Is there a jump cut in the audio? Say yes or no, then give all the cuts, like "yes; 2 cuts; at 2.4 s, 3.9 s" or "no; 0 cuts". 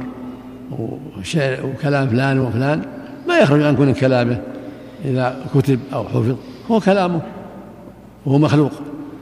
no; 0 cuts